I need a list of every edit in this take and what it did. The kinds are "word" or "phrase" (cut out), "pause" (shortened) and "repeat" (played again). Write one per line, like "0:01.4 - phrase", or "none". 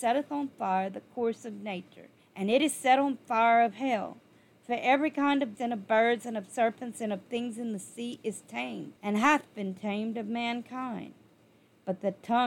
0:02.2 - pause
0:05.5 - word
0:09.0 - pause